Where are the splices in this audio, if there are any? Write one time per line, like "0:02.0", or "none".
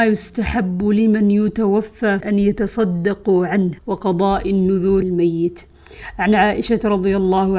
0:02.2
0:03.8
0:05.0